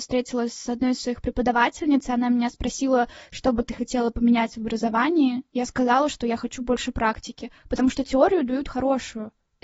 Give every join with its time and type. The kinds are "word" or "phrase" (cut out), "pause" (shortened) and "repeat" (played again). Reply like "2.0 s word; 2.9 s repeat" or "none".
none

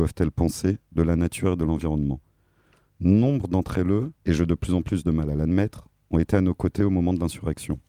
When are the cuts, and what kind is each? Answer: 4.2 s pause

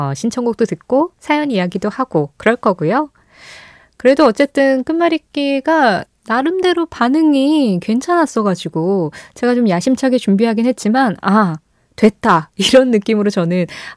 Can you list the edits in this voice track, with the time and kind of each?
none

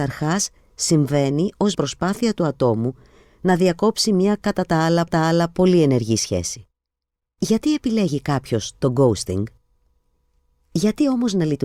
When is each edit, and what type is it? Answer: 1.7 s word; 5.1 s repeat

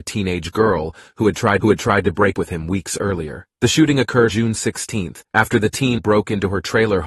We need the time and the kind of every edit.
1.6 s repeat; 2.3 s word; 3.5 s pause; 4.3 s word; 5.2 s pause; 6.0 s word

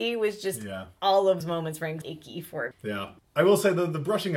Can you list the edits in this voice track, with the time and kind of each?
1.4 s word; 2.0 s word; 2.7 s word; 3.2 s word

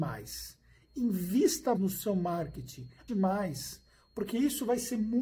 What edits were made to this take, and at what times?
1.8 s word; 3.1 s word

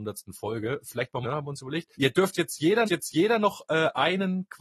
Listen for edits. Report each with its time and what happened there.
1.2 s phrase; 1.9 s pause; 2.9 s repeat

